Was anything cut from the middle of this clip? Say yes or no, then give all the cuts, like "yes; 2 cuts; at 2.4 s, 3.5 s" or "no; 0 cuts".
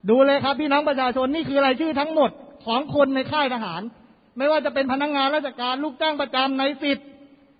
no; 0 cuts